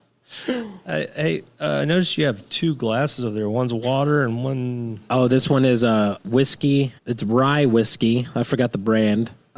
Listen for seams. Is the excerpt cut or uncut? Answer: cut